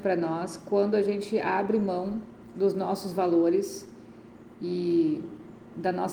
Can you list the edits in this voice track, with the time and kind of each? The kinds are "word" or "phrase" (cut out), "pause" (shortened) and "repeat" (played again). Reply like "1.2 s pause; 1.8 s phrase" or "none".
none